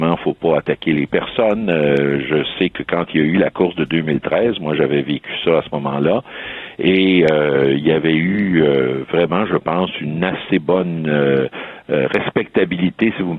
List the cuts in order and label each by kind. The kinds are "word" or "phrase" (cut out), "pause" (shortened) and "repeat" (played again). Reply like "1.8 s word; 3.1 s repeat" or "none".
none